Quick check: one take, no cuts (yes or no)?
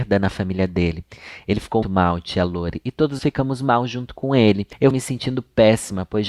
no